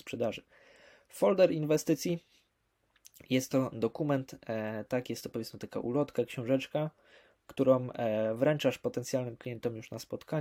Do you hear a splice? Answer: no; 0 cuts

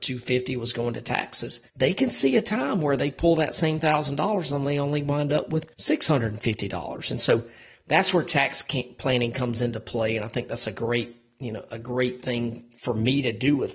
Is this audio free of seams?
no; 2 cuts; at 1.7 s, 5.7 s

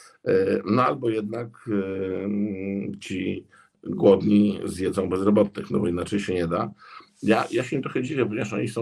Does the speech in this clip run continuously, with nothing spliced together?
yes; 0 cuts

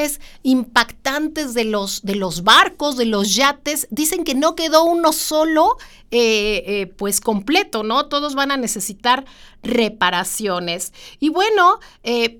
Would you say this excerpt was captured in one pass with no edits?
yes; 0 cuts

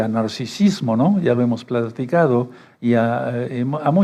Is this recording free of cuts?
yes; 0 cuts

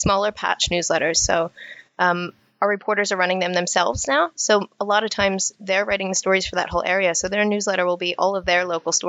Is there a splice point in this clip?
no; 0 cuts

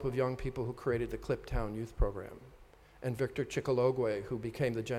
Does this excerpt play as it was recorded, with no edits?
yes; 0 cuts

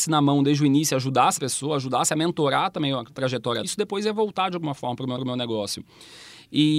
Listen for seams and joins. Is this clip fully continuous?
no; 3 cuts; at 1.4 s, 3.6 s, 5.2 s

